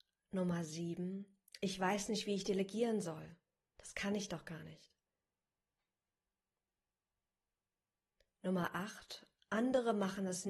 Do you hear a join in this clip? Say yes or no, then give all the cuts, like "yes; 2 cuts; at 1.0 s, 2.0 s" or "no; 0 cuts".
no; 0 cuts